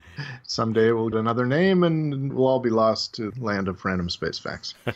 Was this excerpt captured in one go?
no; 3 cuts; at 1.1 s, 2.3 s, 3.3 s

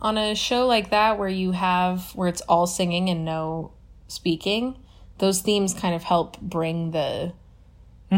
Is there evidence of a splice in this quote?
no; 0 cuts

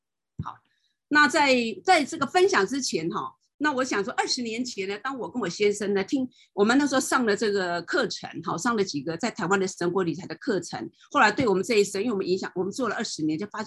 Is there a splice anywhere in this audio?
no; 0 cuts

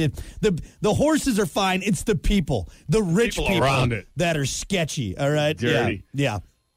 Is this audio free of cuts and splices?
yes; 0 cuts

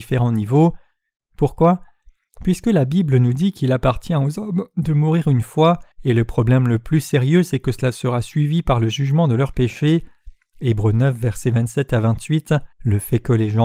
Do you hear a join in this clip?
yes; 2 cuts; at 5.9 s, 12.7 s

